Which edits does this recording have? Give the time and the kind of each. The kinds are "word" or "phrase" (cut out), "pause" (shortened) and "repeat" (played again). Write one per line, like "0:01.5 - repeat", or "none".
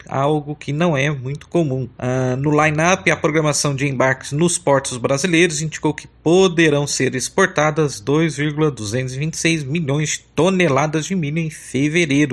none